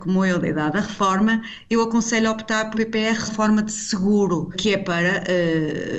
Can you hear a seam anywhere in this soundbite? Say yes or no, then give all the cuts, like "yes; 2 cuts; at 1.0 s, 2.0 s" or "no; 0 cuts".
yes; 3 cuts; at 2.7 s, 3.3 s, 4.5 s